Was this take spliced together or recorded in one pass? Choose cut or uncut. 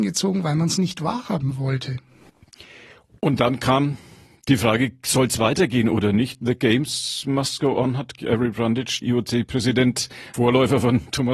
cut